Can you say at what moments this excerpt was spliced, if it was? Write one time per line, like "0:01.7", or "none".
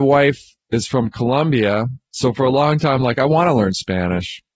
none